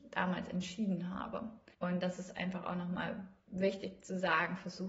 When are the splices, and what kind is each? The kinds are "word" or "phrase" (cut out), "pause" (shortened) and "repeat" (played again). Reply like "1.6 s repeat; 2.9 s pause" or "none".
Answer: 1.7 s pause